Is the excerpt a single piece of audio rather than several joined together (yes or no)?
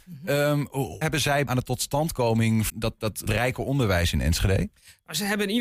no